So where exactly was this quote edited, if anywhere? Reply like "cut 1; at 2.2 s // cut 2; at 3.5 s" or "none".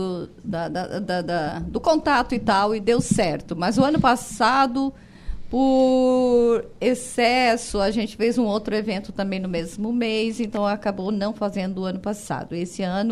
none